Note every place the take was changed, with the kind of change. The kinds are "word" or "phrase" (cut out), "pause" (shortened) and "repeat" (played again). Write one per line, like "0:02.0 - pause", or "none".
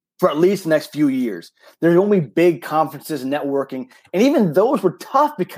none

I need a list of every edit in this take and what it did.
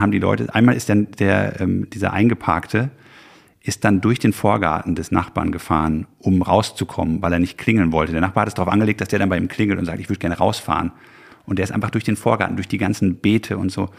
none

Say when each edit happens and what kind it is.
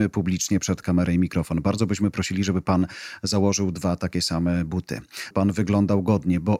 0:05.3 - word

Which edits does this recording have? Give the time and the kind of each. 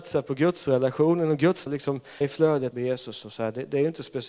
0:01.7 - word
0:02.2 - word
0:02.7 - word

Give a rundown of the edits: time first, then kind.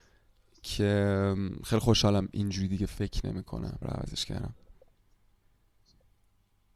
0:03.8 - phrase

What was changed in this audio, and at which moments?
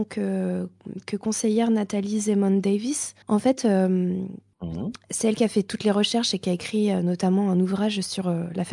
0:03.2 - pause

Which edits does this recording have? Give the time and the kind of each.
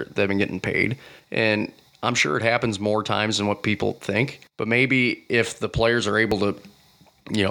0:04.5 - pause

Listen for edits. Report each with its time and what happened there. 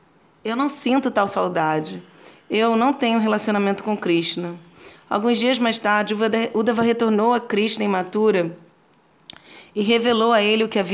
none

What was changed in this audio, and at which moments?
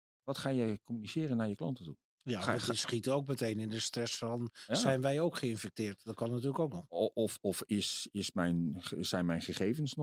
0:02.1 - pause

